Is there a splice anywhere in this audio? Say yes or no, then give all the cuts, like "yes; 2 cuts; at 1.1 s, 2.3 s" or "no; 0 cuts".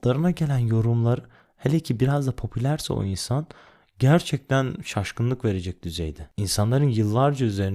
no; 0 cuts